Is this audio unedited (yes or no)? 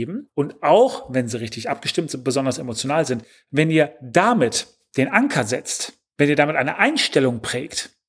yes